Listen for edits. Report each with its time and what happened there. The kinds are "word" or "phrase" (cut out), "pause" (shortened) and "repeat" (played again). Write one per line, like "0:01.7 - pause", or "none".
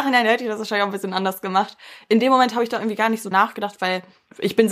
0:03.3 - word